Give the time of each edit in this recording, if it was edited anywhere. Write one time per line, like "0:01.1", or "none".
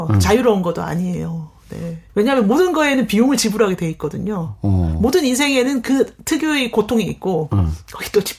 0:02.1